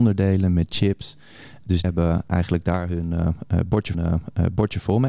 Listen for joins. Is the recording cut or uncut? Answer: cut